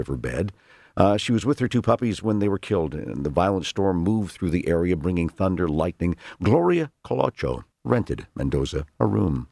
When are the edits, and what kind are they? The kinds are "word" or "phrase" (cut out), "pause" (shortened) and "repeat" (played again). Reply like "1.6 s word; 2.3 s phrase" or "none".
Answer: 7.7 s pause